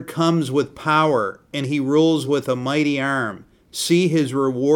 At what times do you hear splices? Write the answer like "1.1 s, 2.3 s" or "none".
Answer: none